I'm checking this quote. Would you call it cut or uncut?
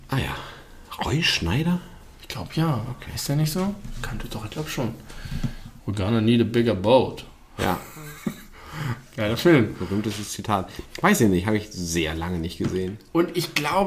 cut